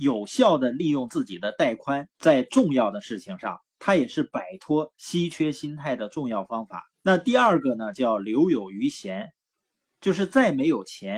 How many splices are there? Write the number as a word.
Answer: two